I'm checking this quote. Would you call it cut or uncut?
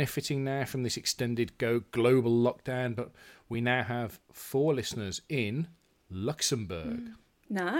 uncut